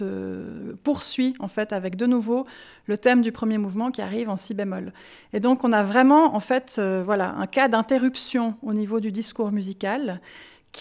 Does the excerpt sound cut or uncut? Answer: uncut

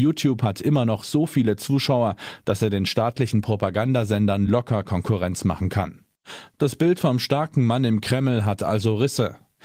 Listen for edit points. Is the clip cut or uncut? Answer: uncut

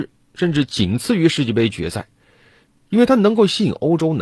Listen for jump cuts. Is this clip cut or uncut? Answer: uncut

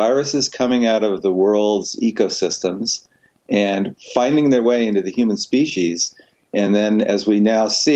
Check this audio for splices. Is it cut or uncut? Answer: uncut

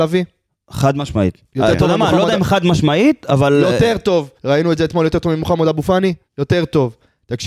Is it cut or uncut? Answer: cut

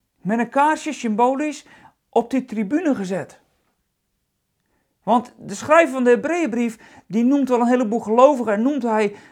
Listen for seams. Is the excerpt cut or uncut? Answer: uncut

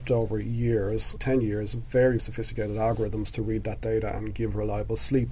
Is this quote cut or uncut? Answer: cut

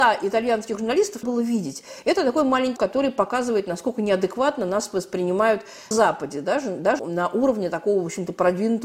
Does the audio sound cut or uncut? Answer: cut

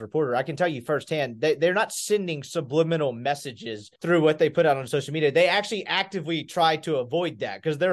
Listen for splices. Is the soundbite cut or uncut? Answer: cut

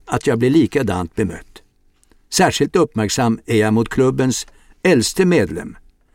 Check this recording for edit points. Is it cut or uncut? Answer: uncut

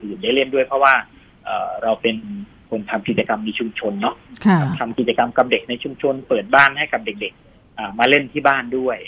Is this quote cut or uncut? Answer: uncut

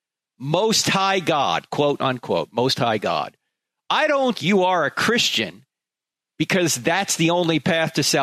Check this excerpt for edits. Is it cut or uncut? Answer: cut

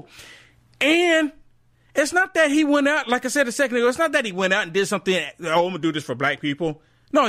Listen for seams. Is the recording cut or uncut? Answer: uncut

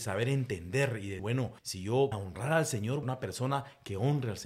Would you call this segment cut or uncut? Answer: cut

